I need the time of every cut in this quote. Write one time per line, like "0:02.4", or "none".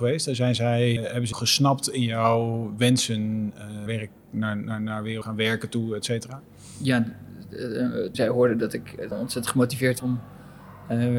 0:01.0
0:01.3
0:03.9
0:05.2
0:08.1
0:09.1
0:10.0